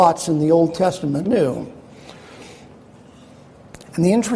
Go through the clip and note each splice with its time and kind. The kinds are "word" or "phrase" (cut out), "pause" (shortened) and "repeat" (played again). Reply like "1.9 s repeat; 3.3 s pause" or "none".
1.2 s phrase